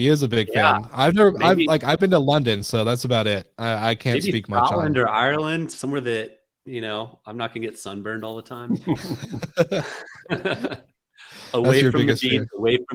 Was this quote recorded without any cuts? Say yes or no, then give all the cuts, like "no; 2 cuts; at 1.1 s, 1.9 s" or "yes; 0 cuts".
yes; 0 cuts